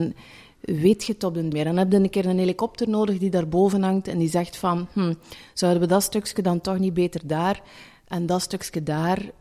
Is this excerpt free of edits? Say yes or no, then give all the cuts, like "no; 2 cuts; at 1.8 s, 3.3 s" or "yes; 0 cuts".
no; 1 cut; at 1.5 s